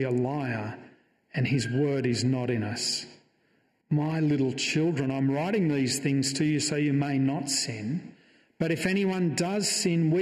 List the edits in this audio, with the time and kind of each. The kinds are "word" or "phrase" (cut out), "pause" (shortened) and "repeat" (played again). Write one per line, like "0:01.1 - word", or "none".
none